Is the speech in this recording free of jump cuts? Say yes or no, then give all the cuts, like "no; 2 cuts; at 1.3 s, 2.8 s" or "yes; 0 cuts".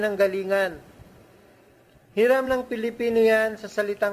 yes; 0 cuts